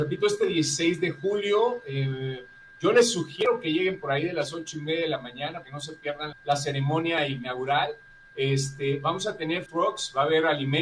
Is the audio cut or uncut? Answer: cut